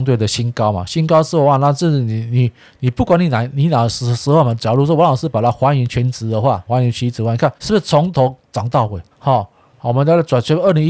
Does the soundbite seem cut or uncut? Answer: cut